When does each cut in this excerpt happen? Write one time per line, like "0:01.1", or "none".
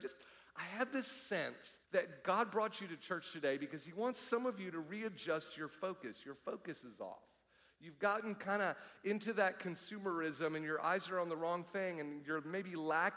0:01.8